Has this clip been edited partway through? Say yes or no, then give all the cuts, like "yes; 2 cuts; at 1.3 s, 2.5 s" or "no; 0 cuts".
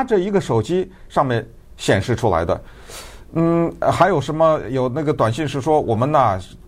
no; 0 cuts